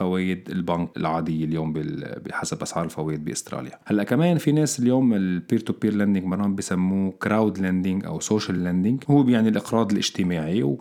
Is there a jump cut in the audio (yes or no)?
no